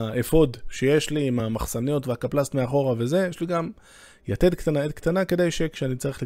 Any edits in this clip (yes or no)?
no